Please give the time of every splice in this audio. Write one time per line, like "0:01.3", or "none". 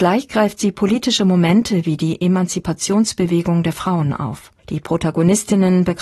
0:04.6